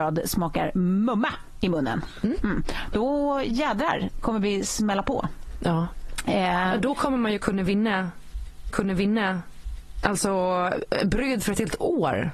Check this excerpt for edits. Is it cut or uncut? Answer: cut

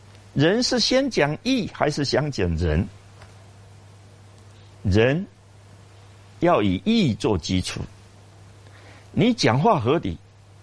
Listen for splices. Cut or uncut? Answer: uncut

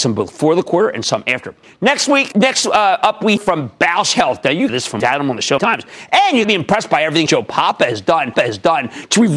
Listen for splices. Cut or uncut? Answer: cut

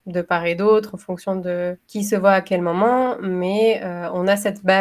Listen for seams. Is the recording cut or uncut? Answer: cut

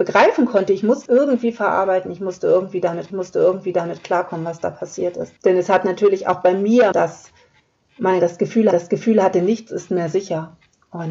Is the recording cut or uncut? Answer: cut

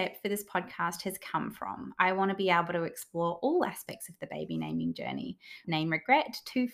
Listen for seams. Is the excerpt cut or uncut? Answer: cut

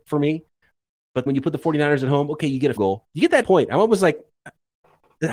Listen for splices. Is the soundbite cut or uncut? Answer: cut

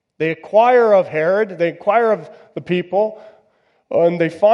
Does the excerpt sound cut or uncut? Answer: uncut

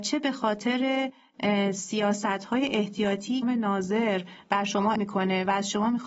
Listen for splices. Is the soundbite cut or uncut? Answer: cut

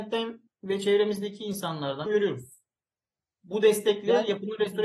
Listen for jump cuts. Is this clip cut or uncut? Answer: cut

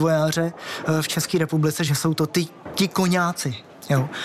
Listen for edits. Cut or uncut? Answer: uncut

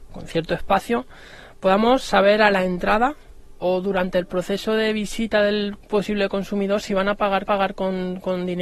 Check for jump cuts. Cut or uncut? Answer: cut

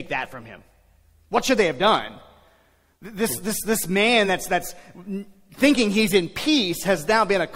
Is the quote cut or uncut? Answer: uncut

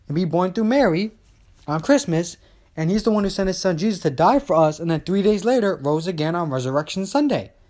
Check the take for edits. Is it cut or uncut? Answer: uncut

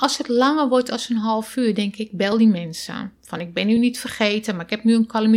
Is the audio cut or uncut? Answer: uncut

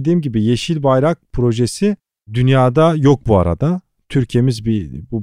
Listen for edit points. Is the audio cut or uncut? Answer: uncut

